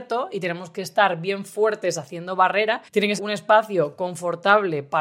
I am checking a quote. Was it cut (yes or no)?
yes